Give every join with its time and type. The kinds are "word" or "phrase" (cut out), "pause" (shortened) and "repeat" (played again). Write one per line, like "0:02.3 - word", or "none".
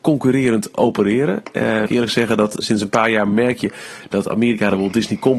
0:01.9 - phrase
0:02.6 - word